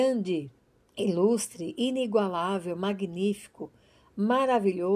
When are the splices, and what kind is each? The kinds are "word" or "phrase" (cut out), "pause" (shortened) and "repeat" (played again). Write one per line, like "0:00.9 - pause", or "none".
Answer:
none

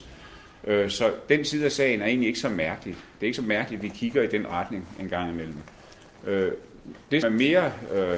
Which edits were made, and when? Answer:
0:07.2 - word

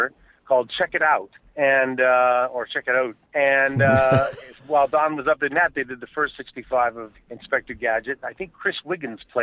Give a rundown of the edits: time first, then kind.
0:01.5 - pause
0:03.2 - pause
0:04.6 - word
0:05.5 - word
0:07.1 - word

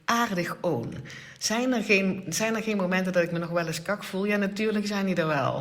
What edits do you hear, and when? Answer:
none

